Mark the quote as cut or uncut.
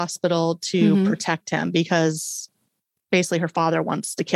uncut